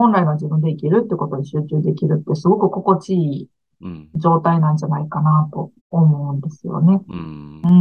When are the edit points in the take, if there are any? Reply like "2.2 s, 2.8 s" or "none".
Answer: 5.8 s